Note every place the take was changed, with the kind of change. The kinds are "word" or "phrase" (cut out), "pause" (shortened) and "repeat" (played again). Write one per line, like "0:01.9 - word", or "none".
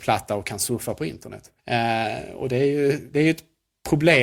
0:01.6 - pause
0:03.1 - word